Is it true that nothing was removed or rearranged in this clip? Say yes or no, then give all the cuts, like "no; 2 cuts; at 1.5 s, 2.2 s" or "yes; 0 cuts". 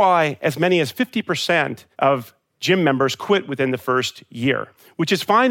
no; 1 cut; at 1.9 s